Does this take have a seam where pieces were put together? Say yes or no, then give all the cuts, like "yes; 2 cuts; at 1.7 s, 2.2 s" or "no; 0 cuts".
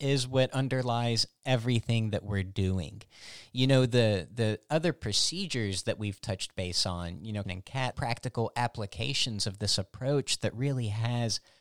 yes; 2 cuts; at 7.4 s, 7.9 s